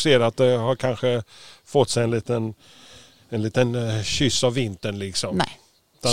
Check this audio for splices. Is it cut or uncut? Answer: uncut